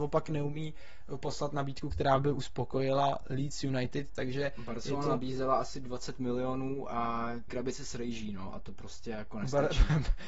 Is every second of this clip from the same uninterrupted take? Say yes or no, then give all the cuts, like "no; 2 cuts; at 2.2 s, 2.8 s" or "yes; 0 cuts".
no; 1 cut; at 7.5 s